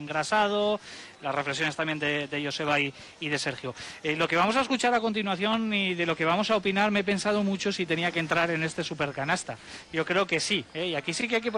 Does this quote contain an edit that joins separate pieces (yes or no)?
no